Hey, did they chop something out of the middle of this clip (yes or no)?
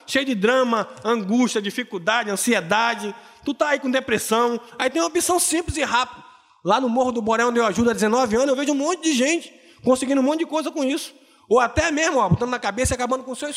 no